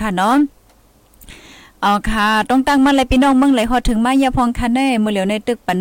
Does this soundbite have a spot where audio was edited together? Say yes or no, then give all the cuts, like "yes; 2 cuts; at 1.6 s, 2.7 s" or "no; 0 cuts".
no; 0 cuts